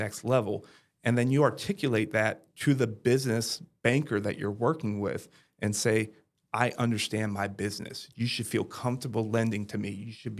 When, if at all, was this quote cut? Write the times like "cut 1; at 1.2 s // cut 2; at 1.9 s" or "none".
none